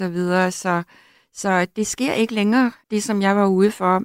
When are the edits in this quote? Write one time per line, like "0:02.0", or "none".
0:02.8